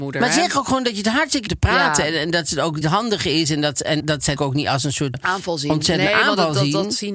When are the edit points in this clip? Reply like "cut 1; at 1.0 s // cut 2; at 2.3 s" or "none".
cut 1; at 1.5 s // cut 2; at 2.8 s // cut 3; at 4.0 s // cut 4; at 4.4 s // cut 5; at 5.1 s